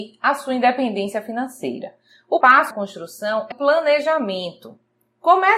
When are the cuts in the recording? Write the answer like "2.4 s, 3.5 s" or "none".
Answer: 2.4 s, 2.7 s, 3.5 s